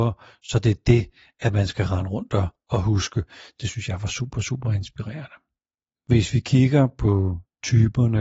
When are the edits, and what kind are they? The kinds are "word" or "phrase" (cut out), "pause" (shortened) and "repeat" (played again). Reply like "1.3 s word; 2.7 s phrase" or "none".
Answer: none